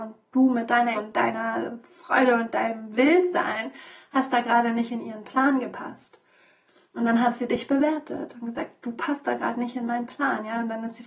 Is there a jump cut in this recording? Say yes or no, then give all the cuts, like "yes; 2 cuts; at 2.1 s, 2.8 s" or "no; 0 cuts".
yes; 1 cut; at 0.9 s